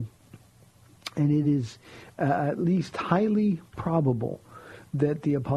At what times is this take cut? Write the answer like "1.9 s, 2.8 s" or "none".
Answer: none